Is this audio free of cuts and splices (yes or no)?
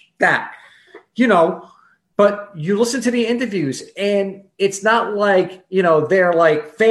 yes